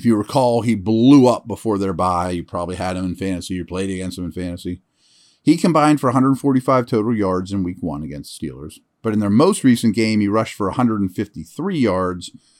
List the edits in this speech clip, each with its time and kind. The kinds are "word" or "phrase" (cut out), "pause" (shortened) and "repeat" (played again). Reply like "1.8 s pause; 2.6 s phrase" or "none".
none